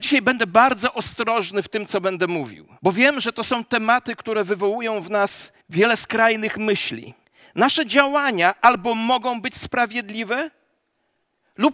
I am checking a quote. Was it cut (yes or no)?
yes